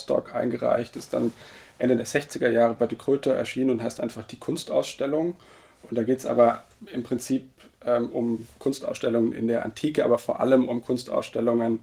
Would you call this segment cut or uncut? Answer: uncut